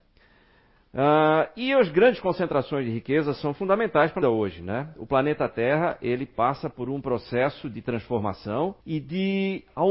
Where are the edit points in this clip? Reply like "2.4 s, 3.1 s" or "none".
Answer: 4.2 s, 8.8 s